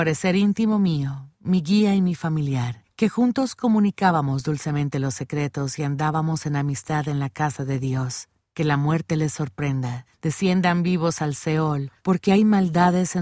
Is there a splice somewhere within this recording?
no; 0 cuts

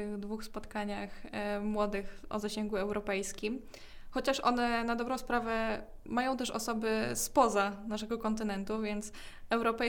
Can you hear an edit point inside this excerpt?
no; 0 cuts

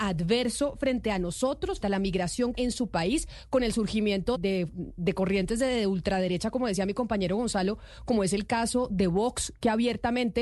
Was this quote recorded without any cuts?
no; 3 cuts; at 1.8 s, 2.5 s, 4.3 s

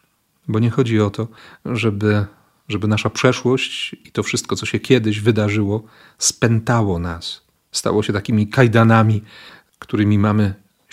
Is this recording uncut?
yes; 0 cuts

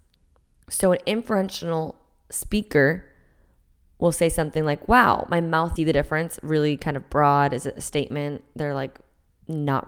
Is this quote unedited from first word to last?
no; 1 cut; at 5.8 s

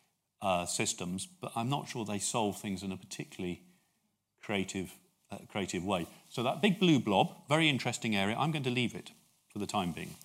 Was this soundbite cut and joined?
no; 0 cuts

